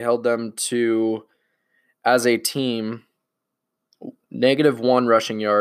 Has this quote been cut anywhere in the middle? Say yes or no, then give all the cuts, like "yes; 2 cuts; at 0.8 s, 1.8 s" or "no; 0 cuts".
no; 0 cuts